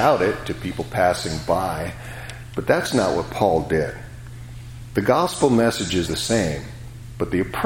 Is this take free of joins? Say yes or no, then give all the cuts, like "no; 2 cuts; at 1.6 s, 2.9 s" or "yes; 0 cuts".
no; 1 cut; at 6.1 s